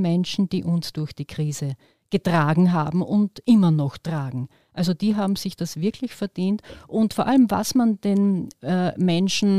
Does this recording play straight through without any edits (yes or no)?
yes